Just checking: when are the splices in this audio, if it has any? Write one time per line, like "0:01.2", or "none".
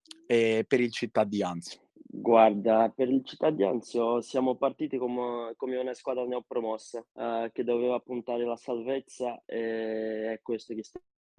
0:01.9
0:07.1